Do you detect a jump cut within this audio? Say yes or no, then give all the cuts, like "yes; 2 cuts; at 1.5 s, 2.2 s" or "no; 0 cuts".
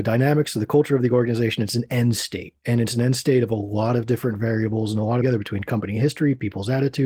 yes; 2 cuts; at 2.6 s, 5.2 s